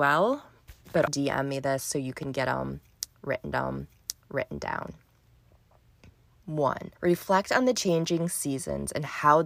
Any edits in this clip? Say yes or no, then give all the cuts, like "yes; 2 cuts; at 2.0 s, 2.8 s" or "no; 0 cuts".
yes; 3 cuts; at 1.1 s, 3.5 s, 7.0 s